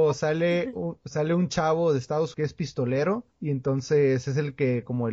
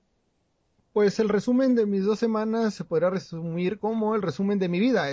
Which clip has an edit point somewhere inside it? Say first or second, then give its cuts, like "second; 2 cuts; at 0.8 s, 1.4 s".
first; 2 cuts; at 2.3 s, 3.3 s